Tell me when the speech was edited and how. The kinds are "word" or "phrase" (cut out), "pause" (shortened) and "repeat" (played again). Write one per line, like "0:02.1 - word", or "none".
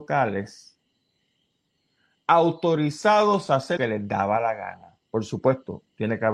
0:03.8 - word